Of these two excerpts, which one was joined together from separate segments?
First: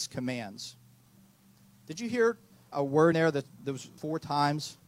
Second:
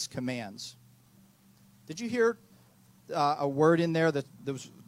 first; 3 cuts; at 2.7 s, 3.1 s, 4.0 s

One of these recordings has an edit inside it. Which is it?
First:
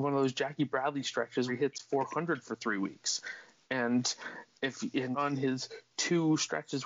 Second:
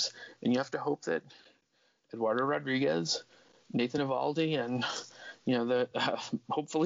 first; 2 cuts; at 1.5 s, 5.1 s

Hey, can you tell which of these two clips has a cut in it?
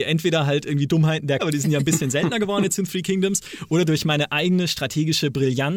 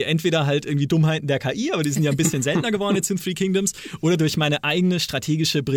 first; 1 cut; at 1.4 s

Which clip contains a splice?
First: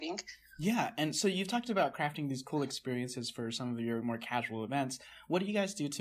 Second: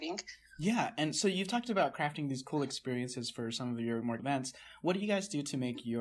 second; 1 cut; at 4.2 s

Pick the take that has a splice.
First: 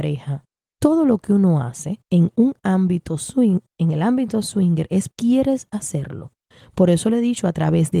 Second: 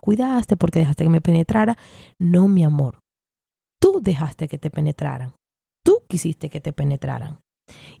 first; 2 cuts; at 2.0 s, 5.1 s

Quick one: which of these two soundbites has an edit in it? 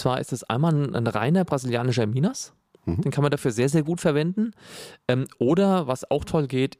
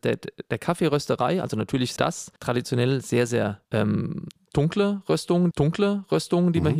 second; 4 cuts; at 2.0 s, 2.4 s, 3.6 s, 5.5 s

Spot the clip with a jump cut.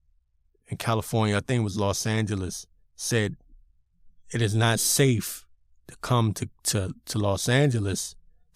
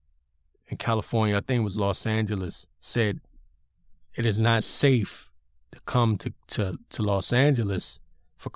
second; 1 cut; at 2.7 s

